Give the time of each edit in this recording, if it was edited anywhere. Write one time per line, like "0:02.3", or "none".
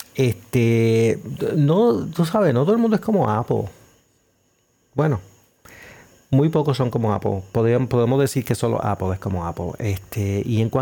none